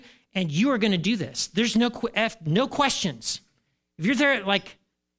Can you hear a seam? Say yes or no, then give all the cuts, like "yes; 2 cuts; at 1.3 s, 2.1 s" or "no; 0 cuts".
no; 0 cuts